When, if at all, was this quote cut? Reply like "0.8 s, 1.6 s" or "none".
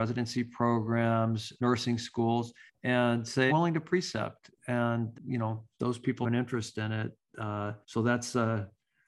1.6 s, 2.7 s, 3.5 s, 5.1 s, 5.7 s, 6.2 s, 7.8 s